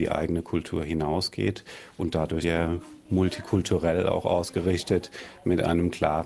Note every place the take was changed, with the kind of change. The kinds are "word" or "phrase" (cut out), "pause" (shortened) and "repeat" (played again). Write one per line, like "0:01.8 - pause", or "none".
0:02.4 - word